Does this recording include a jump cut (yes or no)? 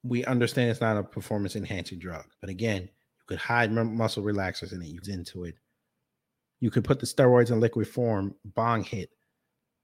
yes